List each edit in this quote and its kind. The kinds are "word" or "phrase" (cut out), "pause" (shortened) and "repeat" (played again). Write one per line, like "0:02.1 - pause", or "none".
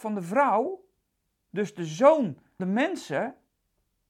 0:02.6 - word